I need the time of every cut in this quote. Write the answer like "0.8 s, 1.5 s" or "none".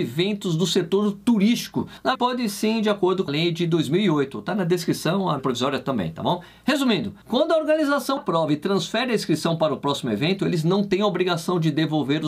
2.1 s, 3.3 s, 5.4 s, 8.2 s